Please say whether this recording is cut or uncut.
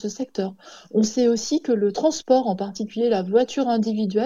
uncut